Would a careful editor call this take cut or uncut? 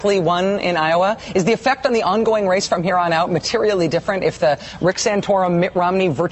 uncut